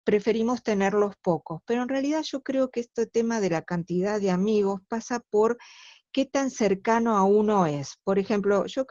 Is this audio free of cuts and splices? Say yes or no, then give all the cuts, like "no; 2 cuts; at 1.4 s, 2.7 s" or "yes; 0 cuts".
yes; 0 cuts